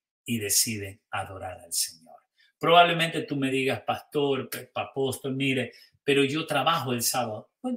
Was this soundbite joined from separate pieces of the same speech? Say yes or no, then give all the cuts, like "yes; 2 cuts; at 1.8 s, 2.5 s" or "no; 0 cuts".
no; 0 cuts